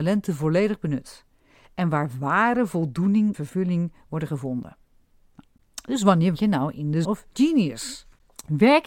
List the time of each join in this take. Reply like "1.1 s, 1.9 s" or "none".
3.3 s, 6.3 s, 7.0 s